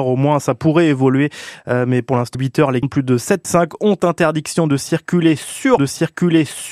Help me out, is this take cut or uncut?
cut